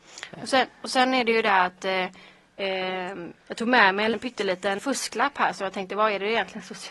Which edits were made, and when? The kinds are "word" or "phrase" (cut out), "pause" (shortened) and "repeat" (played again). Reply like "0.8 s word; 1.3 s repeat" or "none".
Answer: 3.4 s pause; 4.1 s word; 4.8 s word